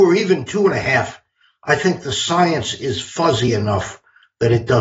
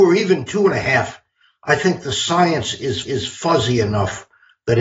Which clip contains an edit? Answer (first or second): second